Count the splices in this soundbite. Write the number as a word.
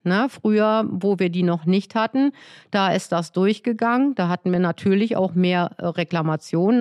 zero